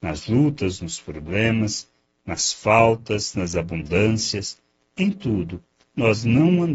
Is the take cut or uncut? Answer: uncut